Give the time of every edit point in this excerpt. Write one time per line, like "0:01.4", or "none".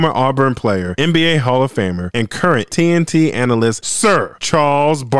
0:02.7